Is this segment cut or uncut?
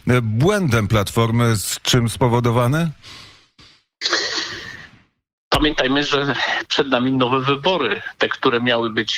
uncut